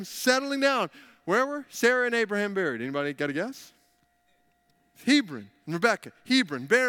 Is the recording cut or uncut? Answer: cut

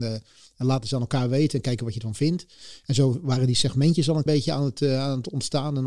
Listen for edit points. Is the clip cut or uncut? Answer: cut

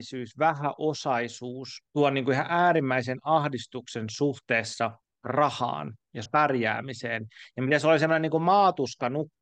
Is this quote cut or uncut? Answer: cut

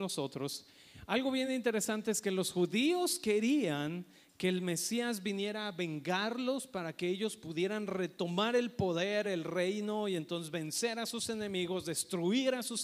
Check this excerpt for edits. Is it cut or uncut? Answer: uncut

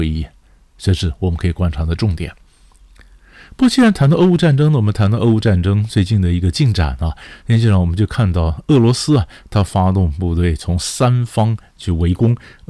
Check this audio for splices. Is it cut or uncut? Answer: uncut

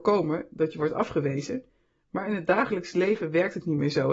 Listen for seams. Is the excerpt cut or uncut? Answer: uncut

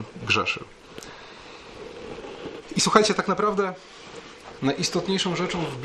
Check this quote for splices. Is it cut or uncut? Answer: cut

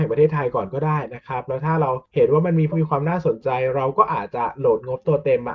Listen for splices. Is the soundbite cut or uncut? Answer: cut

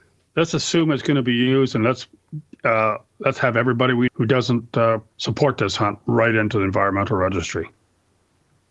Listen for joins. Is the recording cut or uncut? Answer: cut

